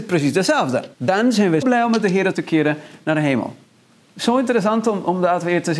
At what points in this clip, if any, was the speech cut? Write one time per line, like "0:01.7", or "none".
0:00.9
0:01.6
0:02.3